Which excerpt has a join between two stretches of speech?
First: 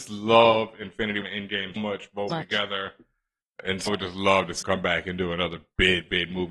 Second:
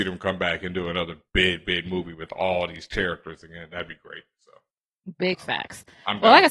first; 5 cuts; at 1.2 s, 1.8 s, 2.3 s, 3.9 s, 4.6 s

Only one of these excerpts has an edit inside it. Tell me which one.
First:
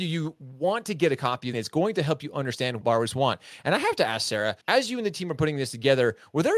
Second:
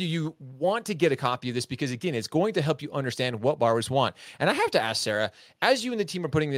first; 3 cuts; at 1.5 s, 2.8 s, 4.6 s

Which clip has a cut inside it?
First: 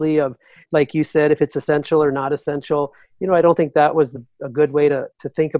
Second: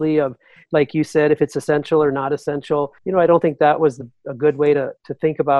second; 1 cut; at 3.0 s

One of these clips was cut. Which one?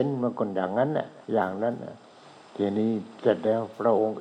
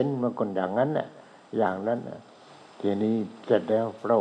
first; 1 cut; at 1.2 s

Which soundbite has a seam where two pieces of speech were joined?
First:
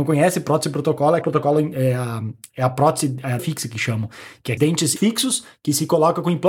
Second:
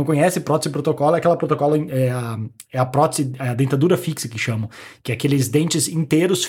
first; 4 cuts; at 1.2 s, 3.4 s, 4.6 s, 5.0 s

